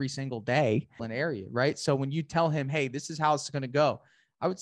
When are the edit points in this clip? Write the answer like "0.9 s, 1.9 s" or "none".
1.0 s